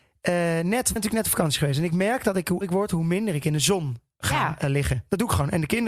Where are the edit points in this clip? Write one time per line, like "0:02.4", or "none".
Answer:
0:01.0
0:02.6